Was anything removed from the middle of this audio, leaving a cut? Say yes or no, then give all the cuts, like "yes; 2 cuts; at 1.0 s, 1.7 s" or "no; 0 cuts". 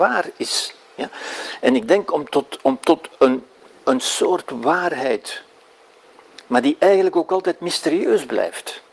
no; 0 cuts